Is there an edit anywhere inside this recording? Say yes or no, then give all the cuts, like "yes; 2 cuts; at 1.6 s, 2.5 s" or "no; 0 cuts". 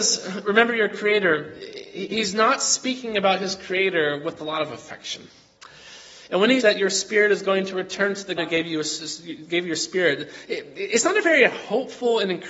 yes; 2 cuts; at 6.6 s, 8.4 s